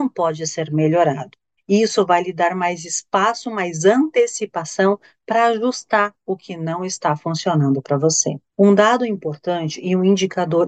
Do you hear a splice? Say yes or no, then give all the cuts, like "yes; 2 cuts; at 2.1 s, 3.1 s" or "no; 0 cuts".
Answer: yes; 2 cuts; at 1.6 s, 8.5 s